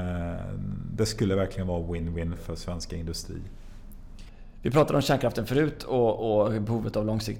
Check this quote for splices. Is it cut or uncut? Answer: cut